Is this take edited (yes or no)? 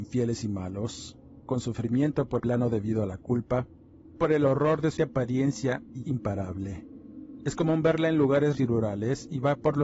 yes